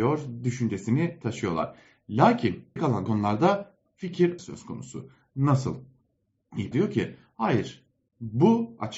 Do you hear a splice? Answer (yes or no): yes